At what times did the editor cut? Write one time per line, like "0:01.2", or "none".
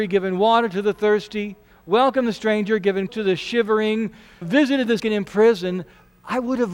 0:03.1
0:04.4
0:05.0